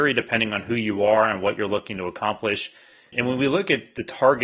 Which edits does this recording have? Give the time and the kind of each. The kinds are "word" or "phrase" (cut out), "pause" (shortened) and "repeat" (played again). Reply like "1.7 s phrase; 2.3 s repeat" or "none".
3.1 s word